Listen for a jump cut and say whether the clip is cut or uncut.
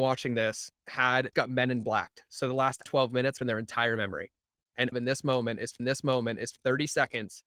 cut